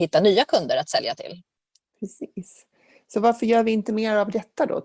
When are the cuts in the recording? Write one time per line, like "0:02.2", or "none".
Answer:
none